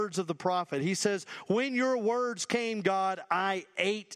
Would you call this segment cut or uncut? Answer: uncut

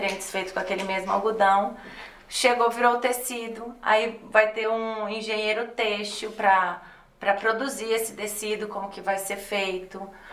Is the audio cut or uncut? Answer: uncut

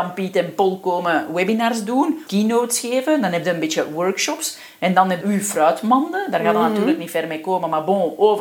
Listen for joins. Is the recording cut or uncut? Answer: cut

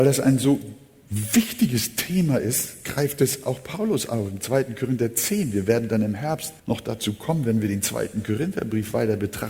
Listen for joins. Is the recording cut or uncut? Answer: cut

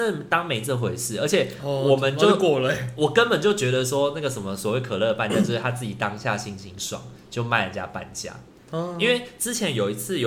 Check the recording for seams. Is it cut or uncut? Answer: uncut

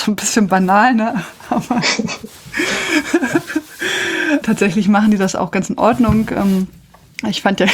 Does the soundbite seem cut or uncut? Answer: cut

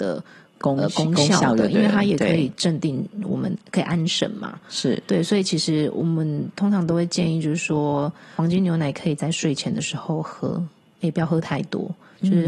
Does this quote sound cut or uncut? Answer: uncut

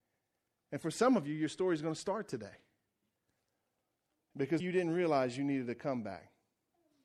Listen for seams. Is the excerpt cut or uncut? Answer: cut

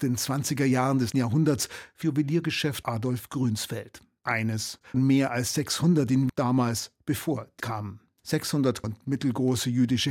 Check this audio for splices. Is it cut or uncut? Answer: cut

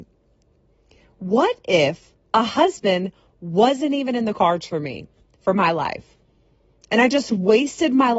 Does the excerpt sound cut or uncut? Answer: uncut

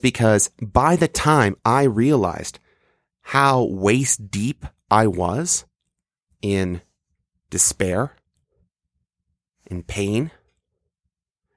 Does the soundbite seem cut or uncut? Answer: uncut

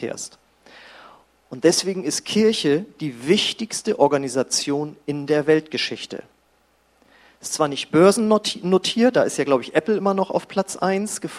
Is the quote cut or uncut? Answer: uncut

